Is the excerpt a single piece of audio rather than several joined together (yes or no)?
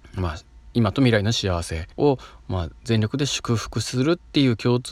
no